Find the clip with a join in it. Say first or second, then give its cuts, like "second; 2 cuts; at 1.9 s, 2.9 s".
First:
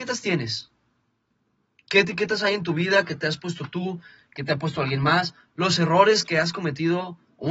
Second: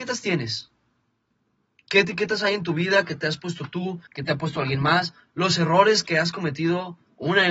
second; 1 cut; at 4.1 s